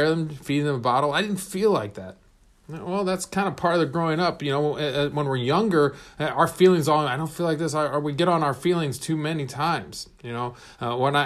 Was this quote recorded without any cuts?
yes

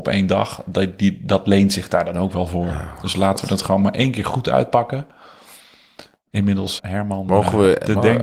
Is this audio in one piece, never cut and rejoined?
no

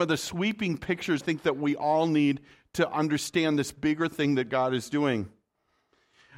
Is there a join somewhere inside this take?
yes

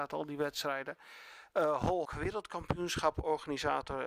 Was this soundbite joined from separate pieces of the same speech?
yes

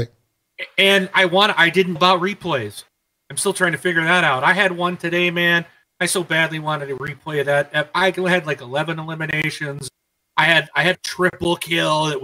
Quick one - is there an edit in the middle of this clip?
yes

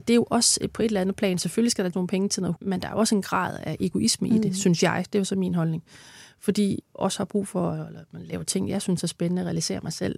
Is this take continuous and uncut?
no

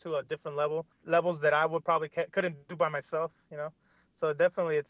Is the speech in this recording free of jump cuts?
yes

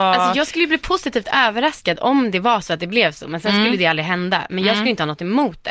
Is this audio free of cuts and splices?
yes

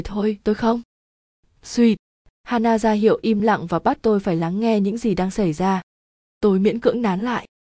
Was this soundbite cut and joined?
no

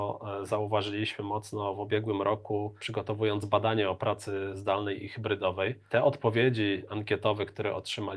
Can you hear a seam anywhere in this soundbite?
no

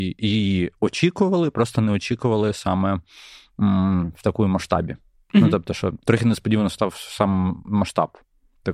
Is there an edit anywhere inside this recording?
no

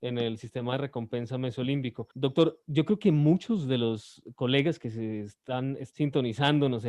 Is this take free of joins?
no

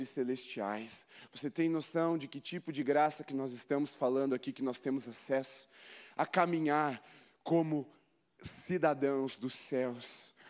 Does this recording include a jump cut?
no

